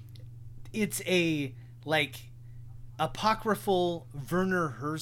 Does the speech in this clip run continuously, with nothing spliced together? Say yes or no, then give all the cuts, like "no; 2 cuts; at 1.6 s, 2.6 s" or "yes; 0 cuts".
yes; 0 cuts